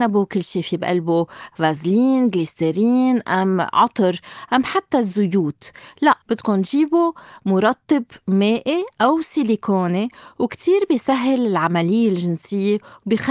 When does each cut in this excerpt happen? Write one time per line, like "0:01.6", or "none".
0:06.2

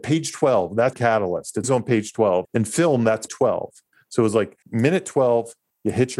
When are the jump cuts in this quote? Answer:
0:00.9
0:01.6
0:02.4
0:03.3
0:04.6

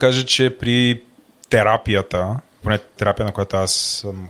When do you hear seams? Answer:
0:02.6
0:03.0

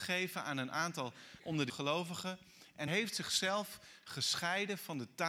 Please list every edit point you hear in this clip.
0:01.4
0:01.7
0:02.9

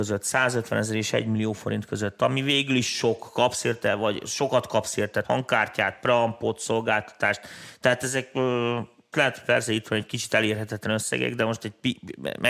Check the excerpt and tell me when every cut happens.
0:05.2
0:09.1

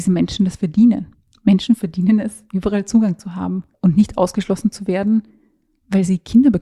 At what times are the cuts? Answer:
0:01.1
0:03.7

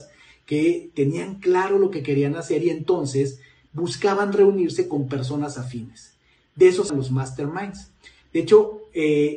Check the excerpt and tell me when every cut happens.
0:06.9

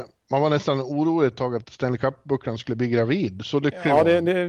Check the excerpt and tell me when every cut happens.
0:01.6

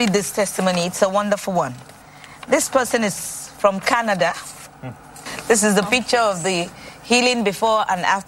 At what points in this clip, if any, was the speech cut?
none

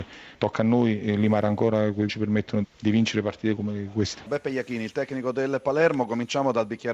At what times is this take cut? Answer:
0:02.1
0:02.6
0:03.6

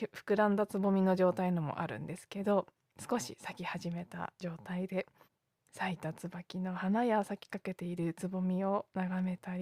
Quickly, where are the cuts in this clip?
0:04.3
0:05.2

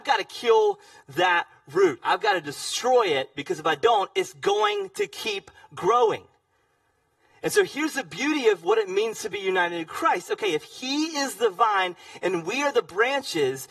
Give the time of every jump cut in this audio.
none

